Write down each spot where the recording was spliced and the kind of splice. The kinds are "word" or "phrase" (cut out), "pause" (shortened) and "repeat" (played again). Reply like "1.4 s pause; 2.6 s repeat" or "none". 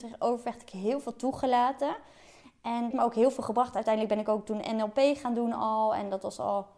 2.9 s phrase